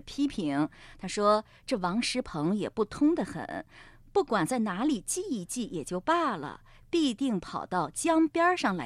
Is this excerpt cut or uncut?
uncut